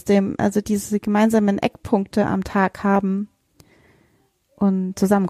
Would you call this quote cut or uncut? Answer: uncut